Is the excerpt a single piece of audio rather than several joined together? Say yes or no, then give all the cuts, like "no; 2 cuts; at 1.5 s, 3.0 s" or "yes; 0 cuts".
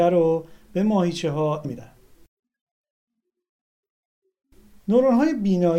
no; 1 cut; at 1.6 s